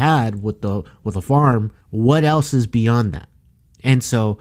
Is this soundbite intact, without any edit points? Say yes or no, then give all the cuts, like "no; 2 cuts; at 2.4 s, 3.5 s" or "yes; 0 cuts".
no; 1 cut; at 1.8 s